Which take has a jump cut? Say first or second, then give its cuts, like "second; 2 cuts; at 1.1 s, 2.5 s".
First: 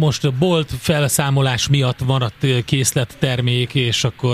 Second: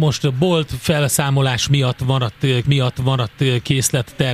second; 1 cut; at 2.6 s